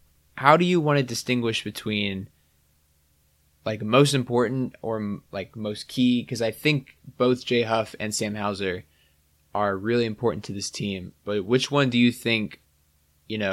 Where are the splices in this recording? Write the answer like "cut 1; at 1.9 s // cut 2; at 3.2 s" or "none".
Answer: none